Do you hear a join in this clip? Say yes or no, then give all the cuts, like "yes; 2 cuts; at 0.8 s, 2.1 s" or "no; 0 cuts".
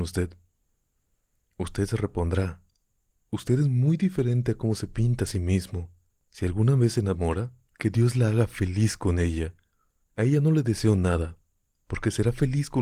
no; 0 cuts